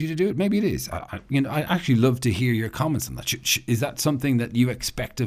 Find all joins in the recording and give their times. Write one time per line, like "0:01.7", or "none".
none